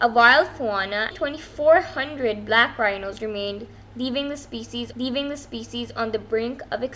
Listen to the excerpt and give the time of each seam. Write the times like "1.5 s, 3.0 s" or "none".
1.1 s, 4.9 s